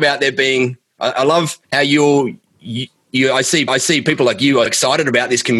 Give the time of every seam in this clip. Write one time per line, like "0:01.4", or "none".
0:01.6
0:02.5
0:03.7
0:04.7

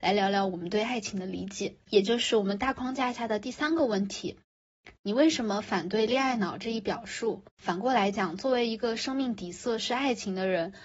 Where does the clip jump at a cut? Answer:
0:01.8
0:07.5

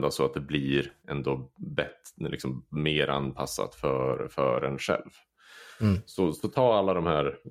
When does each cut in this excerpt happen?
none

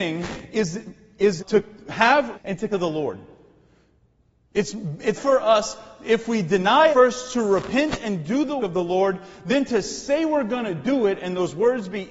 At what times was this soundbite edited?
0:01.4
0:02.3
0:02.7
0:05.2
0:06.9
0:08.6

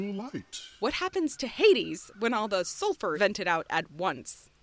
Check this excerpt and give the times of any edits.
0:03.1

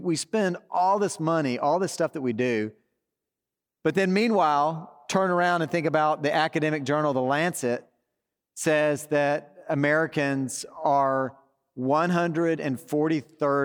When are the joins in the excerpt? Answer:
none

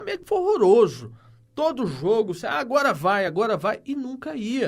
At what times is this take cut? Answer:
none

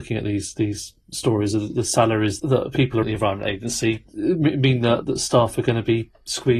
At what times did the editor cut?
0:01.0
0:01.7
0:02.4
0:03.0
0:05.0

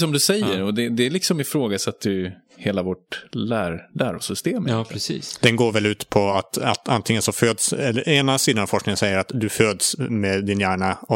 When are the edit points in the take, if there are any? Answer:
none

